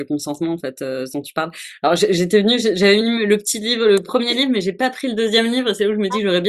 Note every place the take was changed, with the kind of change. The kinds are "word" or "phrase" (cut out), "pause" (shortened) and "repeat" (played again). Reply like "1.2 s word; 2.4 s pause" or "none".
none